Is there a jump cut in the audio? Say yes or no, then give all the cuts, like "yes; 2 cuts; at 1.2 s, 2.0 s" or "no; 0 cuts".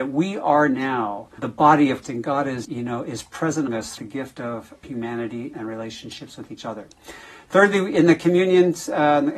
yes; 7 cuts; at 1.4 s, 2.0 s, 2.6 s, 3.7 s, 4.0 s, 4.8 s, 5.5 s